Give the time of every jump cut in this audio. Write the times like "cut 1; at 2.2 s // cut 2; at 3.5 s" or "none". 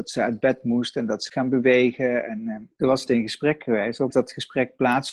cut 1; at 1.3 s // cut 2; at 2.7 s // cut 3; at 3.1 s // cut 4; at 4.1 s